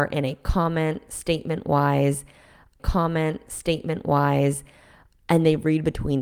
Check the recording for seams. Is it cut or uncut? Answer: cut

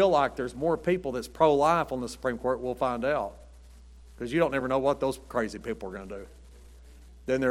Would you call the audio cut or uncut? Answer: uncut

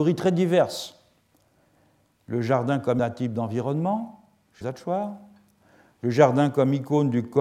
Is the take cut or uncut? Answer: cut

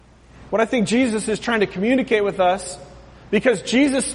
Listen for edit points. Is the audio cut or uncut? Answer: uncut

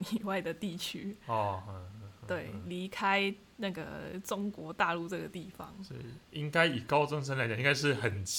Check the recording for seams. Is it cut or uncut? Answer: uncut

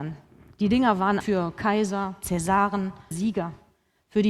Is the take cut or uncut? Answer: cut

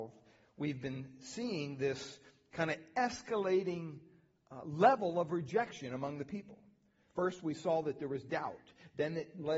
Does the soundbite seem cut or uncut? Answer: uncut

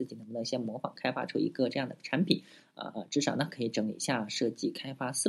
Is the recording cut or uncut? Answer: uncut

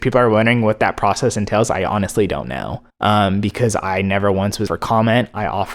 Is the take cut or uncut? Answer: cut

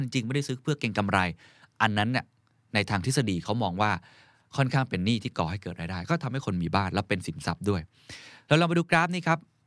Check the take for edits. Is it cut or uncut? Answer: uncut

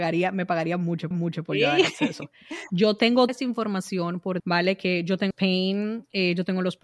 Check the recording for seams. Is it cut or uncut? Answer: cut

